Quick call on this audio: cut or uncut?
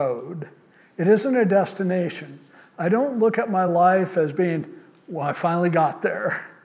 uncut